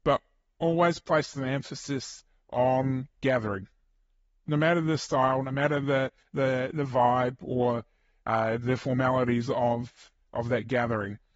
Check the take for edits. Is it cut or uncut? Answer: uncut